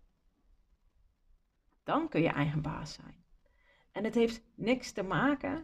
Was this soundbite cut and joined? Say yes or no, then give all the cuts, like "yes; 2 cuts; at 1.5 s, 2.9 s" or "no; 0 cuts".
no; 0 cuts